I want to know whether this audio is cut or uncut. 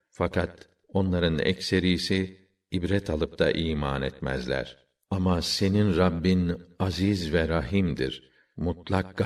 uncut